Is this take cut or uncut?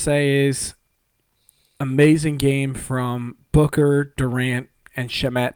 uncut